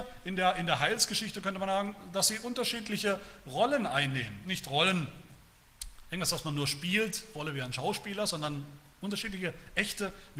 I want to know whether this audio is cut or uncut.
uncut